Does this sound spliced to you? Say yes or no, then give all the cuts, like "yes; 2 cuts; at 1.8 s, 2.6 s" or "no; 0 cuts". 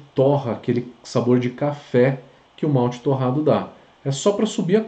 no; 0 cuts